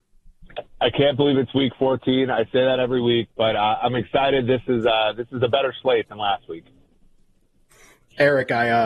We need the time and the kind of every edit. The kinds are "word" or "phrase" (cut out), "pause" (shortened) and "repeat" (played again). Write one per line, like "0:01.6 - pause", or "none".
none